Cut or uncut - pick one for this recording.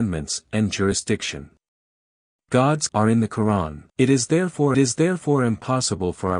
cut